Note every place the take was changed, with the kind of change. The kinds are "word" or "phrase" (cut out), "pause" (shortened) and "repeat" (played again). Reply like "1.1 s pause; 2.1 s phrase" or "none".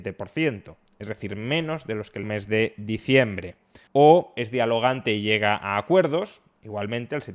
2.2 s phrase; 3.9 s pause